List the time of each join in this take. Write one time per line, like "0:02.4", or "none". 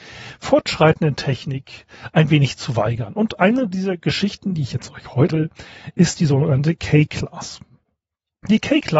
0:05.3